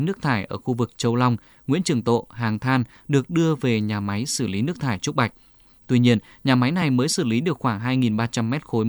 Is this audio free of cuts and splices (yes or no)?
yes